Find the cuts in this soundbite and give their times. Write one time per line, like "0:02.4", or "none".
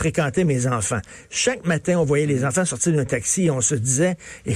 none